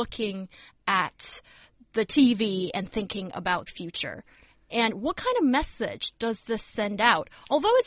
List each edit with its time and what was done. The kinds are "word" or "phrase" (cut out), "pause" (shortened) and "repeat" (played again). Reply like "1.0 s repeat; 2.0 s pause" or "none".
3.7 s word